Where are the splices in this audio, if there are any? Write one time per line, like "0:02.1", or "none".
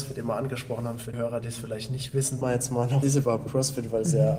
0:01.1
0:02.4
0:03.0